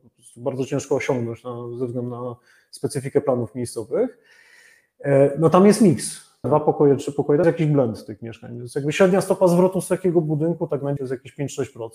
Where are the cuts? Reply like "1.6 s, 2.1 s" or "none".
6.4 s, 7.4 s, 11.0 s

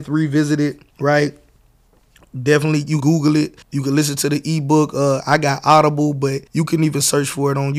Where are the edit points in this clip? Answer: 0.9 s, 3.0 s, 3.6 s, 6.5 s

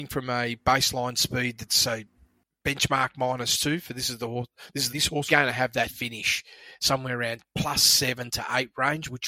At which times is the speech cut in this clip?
4.9 s, 5.3 s

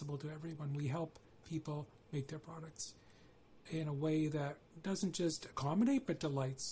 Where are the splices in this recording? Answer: none

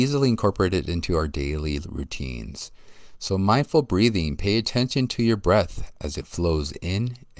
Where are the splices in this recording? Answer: none

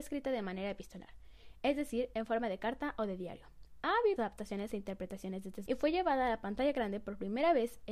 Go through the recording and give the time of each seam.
4.2 s, 5.7 s

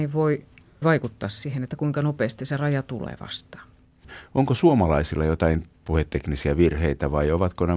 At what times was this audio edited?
5.7 s

